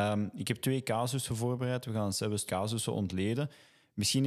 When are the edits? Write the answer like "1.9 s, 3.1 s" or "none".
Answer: 2.5 s